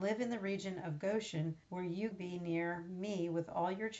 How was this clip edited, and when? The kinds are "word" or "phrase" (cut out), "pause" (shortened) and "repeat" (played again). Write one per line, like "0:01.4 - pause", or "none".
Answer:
0:01.6 - pause
0:02.1 - word

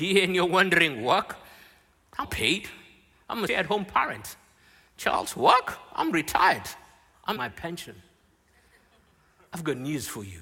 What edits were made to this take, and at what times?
0:02.2 - word
0:03.5 - word
0:07.4 - word

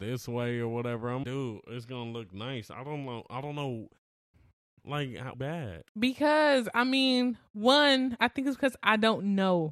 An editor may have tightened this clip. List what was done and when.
0:01.2 - word
0:05.3 - phrase
0:05.9 - pause

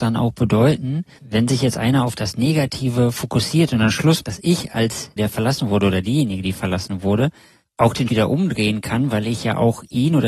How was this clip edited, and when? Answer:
0:01.2 - word
0:04.2 - word
0:05.2 - word
0:08.1 - word

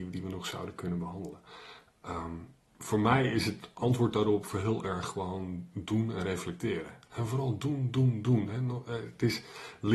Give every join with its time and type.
none

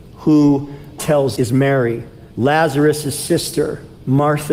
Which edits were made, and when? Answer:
0:01.0 - word
0:01.4 - word
0:02.3 - pause

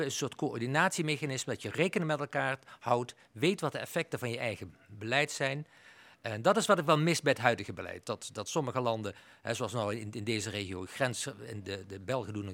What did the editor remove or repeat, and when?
none

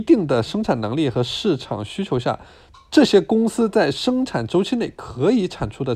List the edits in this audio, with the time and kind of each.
none

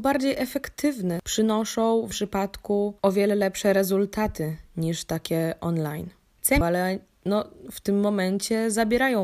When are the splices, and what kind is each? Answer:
0:02.1 - word
0:06.6 - phrase

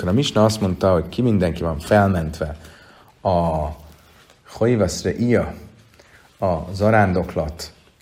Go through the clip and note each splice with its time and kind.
none

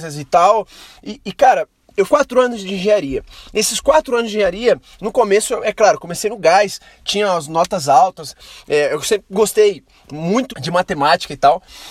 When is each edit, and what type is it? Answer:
0:02.1 - word
0:10.5 - word

